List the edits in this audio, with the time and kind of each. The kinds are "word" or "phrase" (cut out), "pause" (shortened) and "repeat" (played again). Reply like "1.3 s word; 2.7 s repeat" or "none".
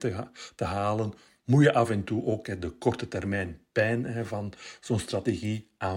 none